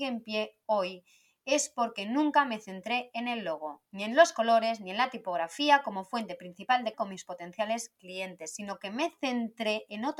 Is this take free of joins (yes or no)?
no